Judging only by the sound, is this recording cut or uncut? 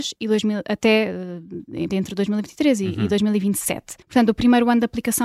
cut